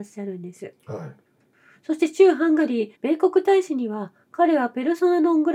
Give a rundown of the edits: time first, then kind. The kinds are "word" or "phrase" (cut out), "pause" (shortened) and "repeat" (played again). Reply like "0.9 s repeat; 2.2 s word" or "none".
2.9 s pause